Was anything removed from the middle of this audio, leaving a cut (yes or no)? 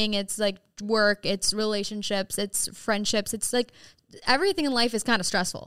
no